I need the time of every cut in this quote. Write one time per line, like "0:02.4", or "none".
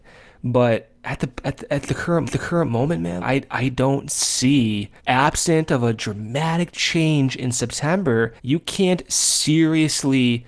0:02.2
0:03.2
0:05.0
0:08.4